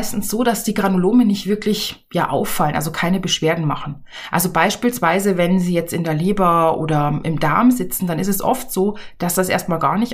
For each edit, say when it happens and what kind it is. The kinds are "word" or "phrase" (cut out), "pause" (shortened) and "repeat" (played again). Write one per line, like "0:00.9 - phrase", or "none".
none